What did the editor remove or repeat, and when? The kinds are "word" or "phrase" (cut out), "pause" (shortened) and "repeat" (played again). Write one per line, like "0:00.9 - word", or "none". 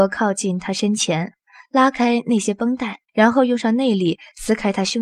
0:03.1 - pause